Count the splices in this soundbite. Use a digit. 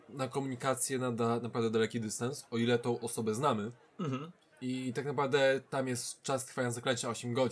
0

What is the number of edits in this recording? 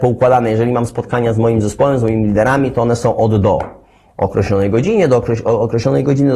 0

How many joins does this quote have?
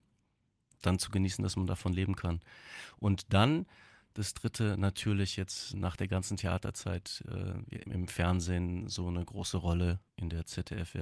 3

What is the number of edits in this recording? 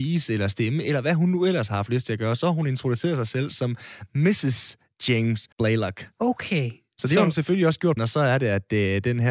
2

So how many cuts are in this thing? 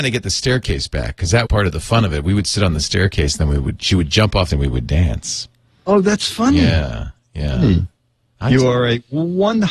2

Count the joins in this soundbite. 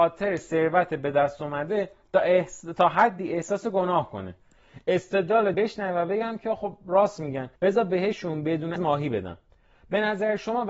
3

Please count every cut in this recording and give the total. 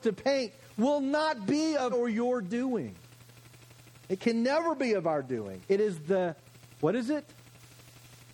2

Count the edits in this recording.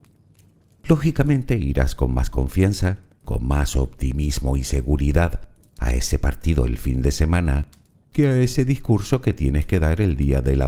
0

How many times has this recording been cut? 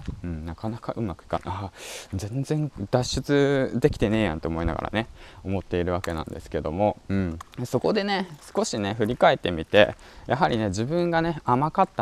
1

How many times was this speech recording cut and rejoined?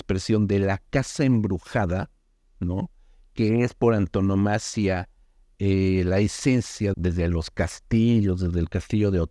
1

